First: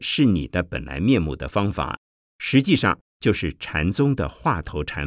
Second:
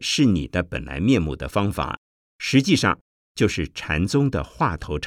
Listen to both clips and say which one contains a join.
first; 1 cut; at 3.1 s

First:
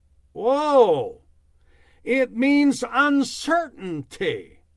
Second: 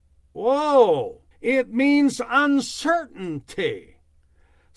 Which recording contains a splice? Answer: second; 1 cut; at 1.3 s

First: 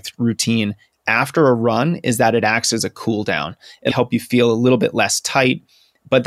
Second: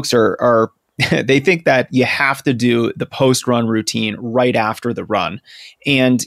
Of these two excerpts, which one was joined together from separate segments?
first; 1 cut; at 3.9 s

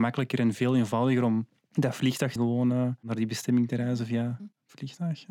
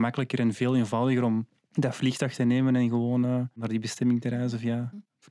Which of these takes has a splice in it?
first; 1 cut; at 2.4 s

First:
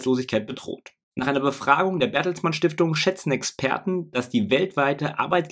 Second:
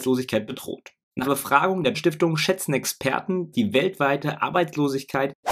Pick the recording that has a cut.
second; 3 cuts; at 1.2 s, 1.9 s, 3.5 s

